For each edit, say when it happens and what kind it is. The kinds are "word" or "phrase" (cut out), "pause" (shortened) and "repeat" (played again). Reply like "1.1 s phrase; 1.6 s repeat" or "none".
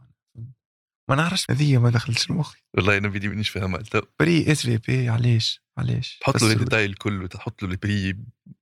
1.5 s phrase